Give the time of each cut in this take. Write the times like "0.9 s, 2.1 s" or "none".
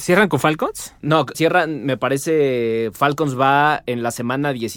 1.3 s